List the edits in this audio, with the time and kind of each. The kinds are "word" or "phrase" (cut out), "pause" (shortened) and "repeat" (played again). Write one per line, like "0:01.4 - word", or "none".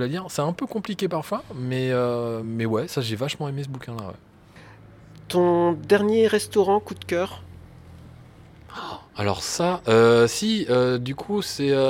none